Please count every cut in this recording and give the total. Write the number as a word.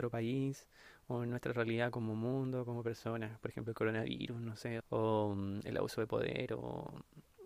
one